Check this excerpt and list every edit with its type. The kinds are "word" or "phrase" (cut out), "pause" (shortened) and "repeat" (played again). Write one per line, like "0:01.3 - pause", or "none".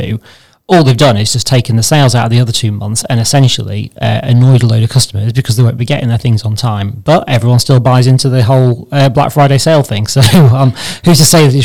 none